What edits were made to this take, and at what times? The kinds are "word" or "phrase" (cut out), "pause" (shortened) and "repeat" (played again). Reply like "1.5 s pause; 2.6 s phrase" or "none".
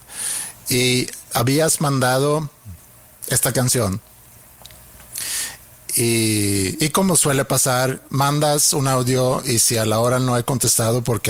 none